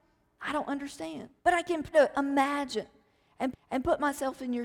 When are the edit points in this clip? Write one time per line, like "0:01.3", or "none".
0:01.4
0:01.9
0:03.5